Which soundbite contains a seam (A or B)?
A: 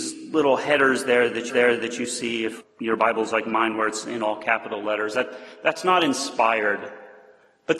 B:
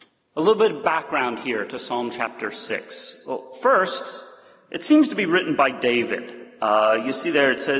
A